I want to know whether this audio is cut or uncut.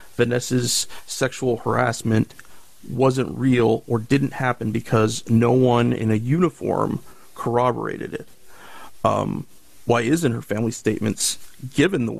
uncut